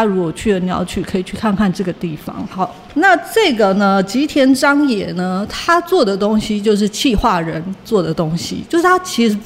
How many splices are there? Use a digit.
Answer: 1